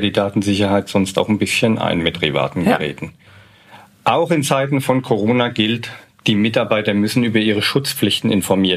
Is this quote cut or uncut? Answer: cut